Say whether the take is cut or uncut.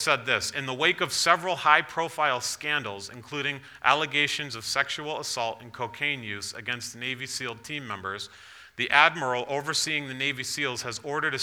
uncut